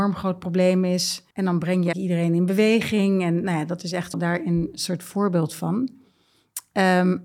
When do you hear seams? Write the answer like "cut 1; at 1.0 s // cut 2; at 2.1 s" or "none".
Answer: cut 1; at 1.3 s // cut 2; at 1.9 s // cut 3; at 4.1 s

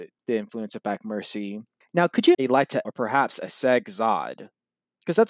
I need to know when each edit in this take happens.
cut 1; at 1.8 s // cut 2; at 2.3 s // cut 3; at 2.8 s

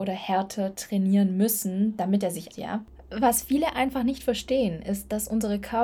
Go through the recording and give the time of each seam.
cut 1; at 2.5 s

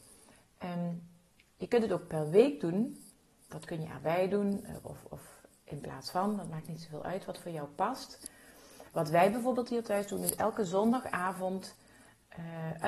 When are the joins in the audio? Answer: none

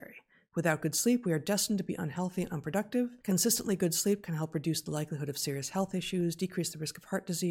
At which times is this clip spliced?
cut 1; at 3.2 s

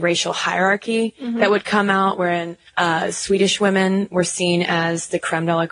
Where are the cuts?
cut 1; at 2.7 s

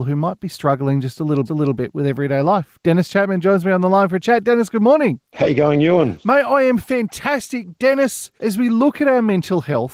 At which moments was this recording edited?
cut 1; at 1.5 s // cut 2; at 5.2 s // cut 3; at 8.4 s

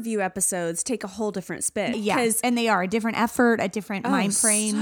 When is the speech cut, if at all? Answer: cut 1; at 1.9 s

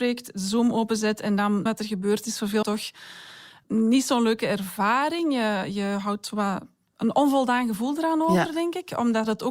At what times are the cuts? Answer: cut 1; at 1.7 s // cut 2; at 2.6 s

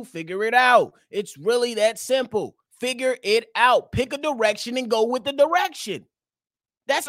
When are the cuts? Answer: cut 1; at 2.7 s

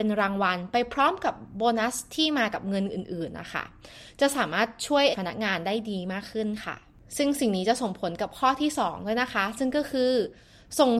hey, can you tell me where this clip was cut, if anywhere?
cut 1; at 5.1 s

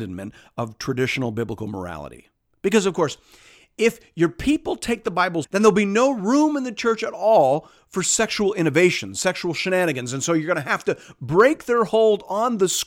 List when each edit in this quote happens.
cut 1; at 5.4 s

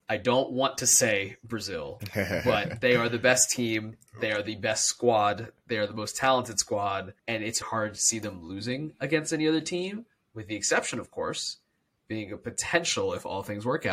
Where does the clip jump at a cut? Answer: cut 1; at 7.2 s // cut 2; at 7.6 s

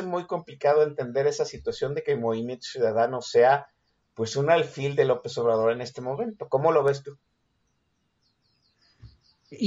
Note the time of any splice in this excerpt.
none

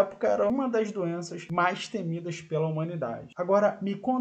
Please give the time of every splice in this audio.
none

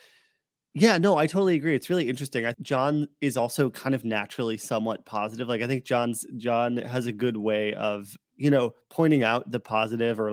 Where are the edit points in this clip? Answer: cut 1; at 2.5 s // cut 2; at 8.2 s

